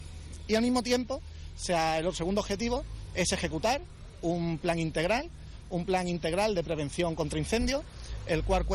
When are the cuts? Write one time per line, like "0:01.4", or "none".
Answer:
none